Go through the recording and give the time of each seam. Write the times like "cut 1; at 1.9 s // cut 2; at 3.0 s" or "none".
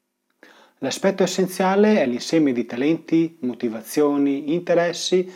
none